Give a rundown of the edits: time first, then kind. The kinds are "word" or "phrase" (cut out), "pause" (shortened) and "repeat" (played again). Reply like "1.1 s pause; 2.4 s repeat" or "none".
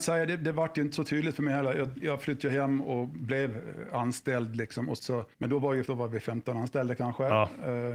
2.0 s word; 5.0 s phrase; 5.3 s pause; 5.8 s word